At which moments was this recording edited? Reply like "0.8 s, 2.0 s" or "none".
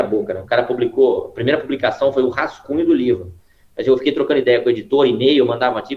none